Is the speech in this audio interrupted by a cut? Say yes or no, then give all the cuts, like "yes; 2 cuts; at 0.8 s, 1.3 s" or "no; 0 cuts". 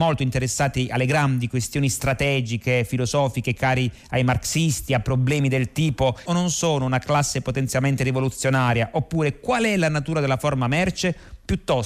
yes; 1 cut; at 6.3 s